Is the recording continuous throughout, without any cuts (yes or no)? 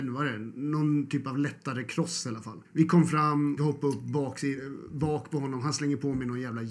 no